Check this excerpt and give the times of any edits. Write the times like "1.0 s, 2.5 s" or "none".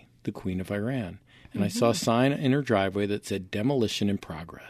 none